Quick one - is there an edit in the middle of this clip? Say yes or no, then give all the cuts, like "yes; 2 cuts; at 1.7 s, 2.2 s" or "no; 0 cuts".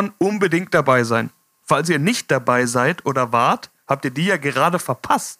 no; 0 cuts